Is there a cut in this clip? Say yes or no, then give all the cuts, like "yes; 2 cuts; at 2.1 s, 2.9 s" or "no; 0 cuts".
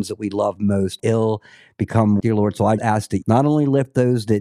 yes; 4 cuts; at 1.0 s, 2.2 s, 2.8 s, 3.2 s